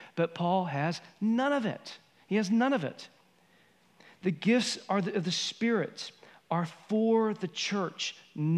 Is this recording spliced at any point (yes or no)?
no